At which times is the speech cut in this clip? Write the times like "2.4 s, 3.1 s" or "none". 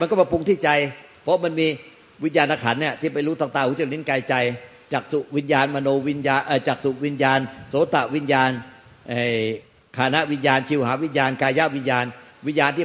none